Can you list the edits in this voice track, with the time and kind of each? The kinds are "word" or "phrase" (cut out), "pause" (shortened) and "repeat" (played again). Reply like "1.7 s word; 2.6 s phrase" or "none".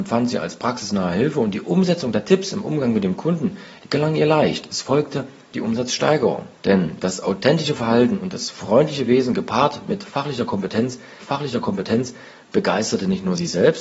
6.5 s pause; 11.2 s repeat